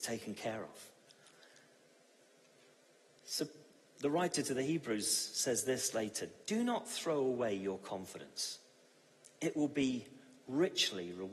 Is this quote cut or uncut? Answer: uncut